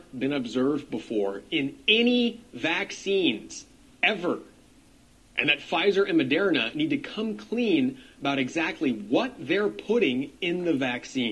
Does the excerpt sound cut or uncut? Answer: uncut